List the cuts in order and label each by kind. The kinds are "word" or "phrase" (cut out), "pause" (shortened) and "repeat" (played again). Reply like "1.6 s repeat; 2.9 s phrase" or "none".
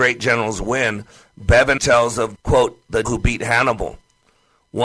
1.8 s word; 2.3 s word; 3.0 s word